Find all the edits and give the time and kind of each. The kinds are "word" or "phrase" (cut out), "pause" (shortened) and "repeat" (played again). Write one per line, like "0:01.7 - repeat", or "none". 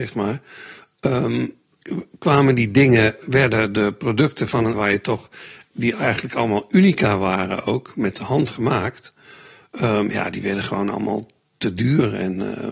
0:03.2 - word
0:04.7 - word
0:05.7 - word